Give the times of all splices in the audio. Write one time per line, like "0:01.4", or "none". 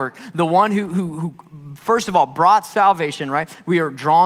none